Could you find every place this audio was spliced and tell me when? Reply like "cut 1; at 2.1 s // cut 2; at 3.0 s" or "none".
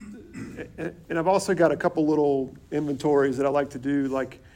none